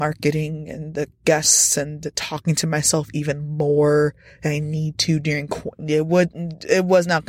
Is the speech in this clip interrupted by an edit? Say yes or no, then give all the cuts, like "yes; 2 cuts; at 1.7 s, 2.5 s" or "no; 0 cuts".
no; 0 cuts